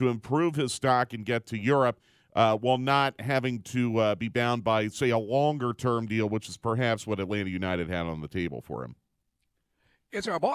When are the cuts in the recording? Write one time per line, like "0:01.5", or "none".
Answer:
none